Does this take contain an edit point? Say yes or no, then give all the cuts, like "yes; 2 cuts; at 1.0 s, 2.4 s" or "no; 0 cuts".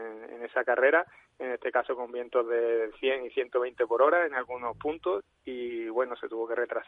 no; 0 cuts